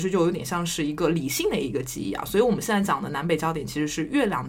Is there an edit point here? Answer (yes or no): no